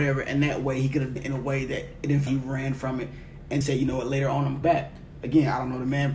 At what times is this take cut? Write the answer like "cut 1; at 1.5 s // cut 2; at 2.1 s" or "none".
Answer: cut 1; at 1.2 s // cut 2; at 2.3 s // cut 3; at 3.6 s // cut 4; at 4.6 s